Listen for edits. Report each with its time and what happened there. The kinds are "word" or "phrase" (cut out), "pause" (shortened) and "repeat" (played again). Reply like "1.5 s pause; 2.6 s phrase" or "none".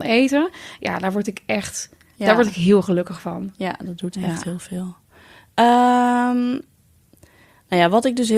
none